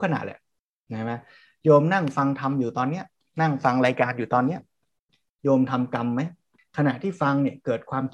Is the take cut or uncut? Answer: uncut